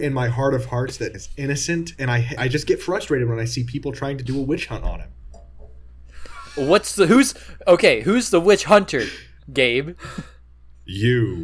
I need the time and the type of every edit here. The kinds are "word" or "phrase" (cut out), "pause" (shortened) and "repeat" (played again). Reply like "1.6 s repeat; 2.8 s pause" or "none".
1.1 s word; 2.4 s word

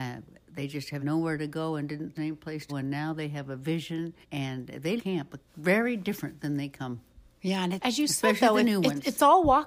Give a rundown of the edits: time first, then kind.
1.0 s word; 2.2 s phrase; 2.7 s word; 4.2 s pause; 5.0 s word; 5.5 s pause; 7.8 s word

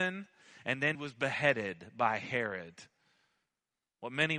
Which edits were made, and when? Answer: 0.9 s word

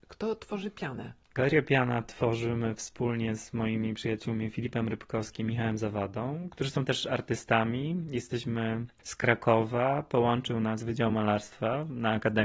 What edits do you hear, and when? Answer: none

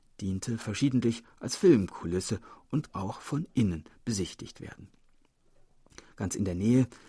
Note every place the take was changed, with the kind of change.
2.9 s word

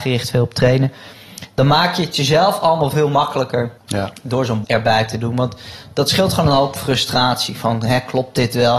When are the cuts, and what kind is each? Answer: 2.9 s word; 3.8 s pause; 4.6 s word

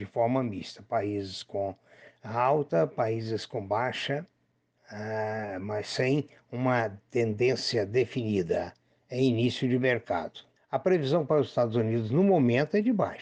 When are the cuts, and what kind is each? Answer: 10.6 s pause

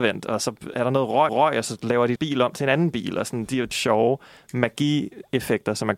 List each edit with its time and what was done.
1.3 s repeat; 2.2 s word; 3.7 s phrase

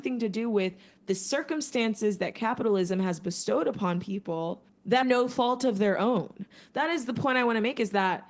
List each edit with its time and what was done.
5.0 s word

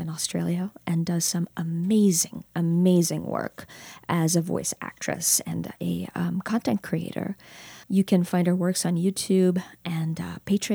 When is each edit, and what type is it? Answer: 7.8 s pause

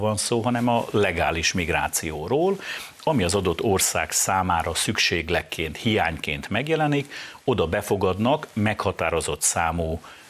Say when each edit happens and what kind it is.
none

